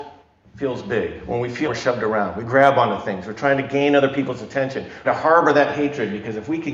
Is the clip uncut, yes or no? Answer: no